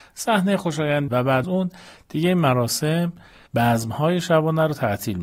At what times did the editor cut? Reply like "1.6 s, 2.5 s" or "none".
1.1 s, 1.4 s, 3.5 s

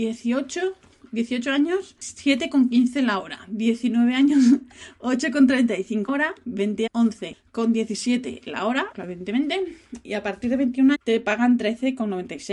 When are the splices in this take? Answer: 6.1 s, 6.9 s, 8.9 s, 10.9 s

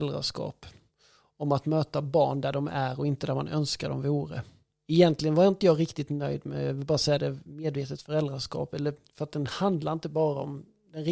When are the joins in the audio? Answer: 4.7 s

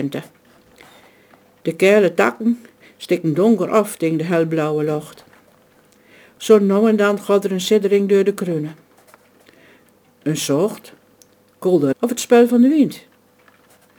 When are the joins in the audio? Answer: 11.9 s

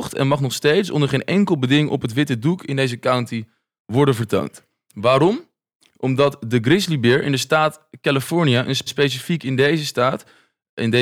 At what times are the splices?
8.9 s

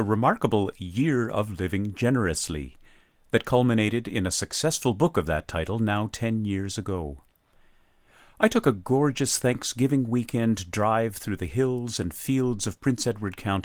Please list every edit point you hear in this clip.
none

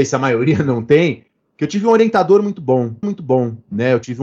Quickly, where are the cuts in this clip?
3.0 s

